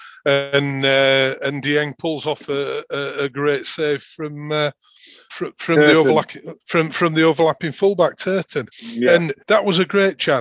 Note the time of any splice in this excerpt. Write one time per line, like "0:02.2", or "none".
0:05.3
0:06.6
0:08.7
0:09.4